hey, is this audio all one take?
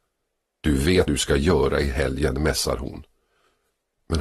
no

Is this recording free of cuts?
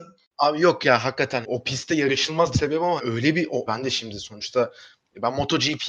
no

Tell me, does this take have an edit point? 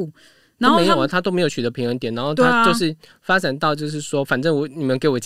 no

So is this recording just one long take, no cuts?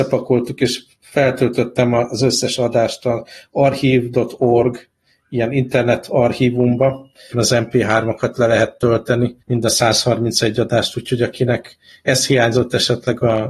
no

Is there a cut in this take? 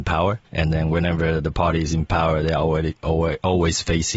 no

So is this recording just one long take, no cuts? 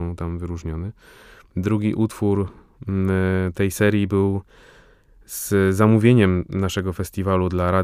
yes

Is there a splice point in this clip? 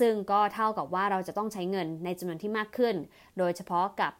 no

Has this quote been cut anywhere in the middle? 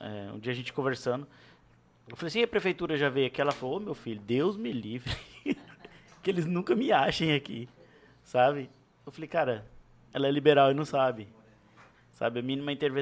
no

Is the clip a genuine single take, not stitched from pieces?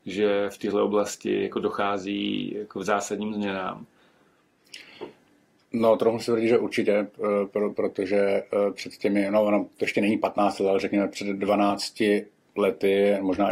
yes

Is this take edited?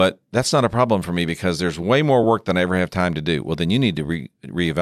no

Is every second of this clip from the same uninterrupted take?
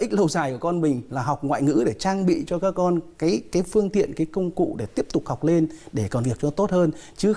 no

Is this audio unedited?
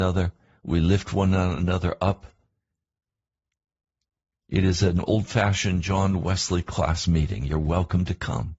yes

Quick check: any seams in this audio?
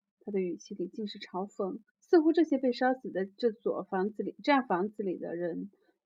yes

